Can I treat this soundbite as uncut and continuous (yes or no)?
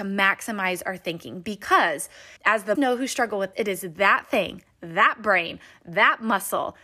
no